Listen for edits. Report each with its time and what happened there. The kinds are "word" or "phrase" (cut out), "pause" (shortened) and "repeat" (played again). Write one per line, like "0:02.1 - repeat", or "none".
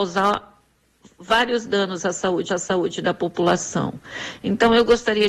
0:02.5 - repeat